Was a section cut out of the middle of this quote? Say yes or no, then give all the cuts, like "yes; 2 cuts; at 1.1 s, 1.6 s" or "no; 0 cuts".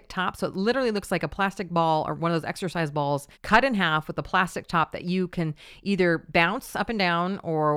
yes; 1 cut; at 3.3 s